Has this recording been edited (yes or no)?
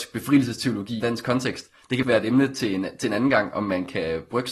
yes